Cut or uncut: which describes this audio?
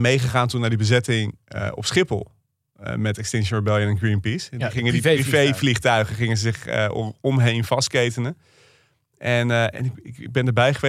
uncut